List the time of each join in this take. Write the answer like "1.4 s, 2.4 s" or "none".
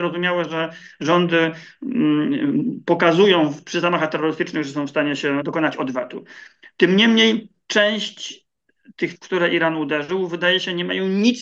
5.4 s, 9.1 s